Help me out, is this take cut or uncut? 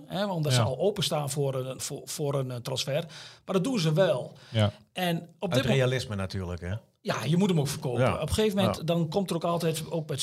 cut